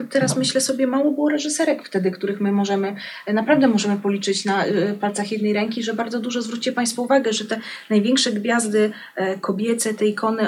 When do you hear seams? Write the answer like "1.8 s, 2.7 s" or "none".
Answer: none